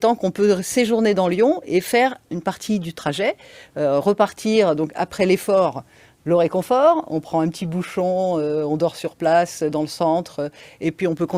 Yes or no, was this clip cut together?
no